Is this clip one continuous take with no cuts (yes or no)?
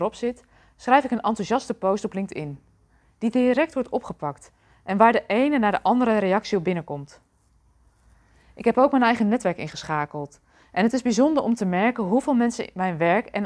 yes